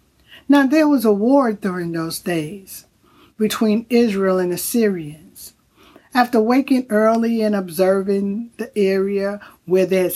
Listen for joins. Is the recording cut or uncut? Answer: uncut